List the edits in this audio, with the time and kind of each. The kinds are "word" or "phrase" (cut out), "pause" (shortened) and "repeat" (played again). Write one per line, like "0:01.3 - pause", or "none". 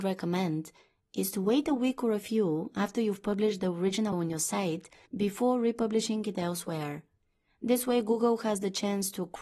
0:04.1 - word